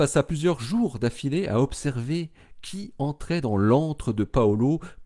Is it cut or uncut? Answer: uncut